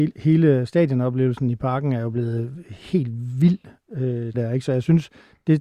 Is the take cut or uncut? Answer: cut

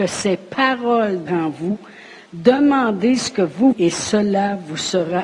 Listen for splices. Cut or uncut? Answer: cut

